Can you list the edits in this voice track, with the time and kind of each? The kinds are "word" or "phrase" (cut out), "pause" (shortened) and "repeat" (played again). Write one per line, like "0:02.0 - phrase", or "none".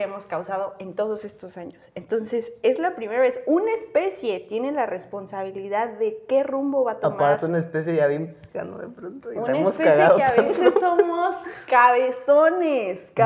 0:08.5 - word